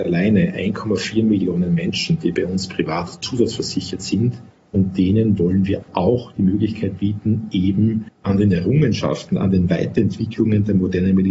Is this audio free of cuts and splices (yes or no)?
yes